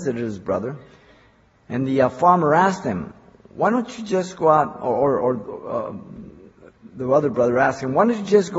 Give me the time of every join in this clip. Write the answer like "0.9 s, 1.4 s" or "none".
none